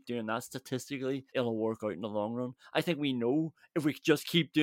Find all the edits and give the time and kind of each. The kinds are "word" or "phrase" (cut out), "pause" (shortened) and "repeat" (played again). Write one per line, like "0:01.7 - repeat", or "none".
0:01.3 - pause